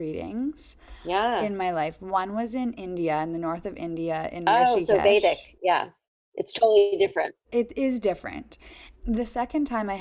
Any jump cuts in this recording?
yes; 1 cut; at 7.4 s

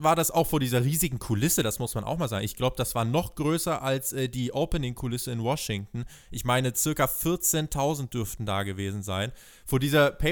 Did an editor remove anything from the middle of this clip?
no; 0 cuts

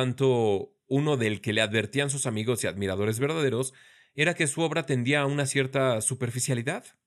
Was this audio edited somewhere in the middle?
no; 0 cuts

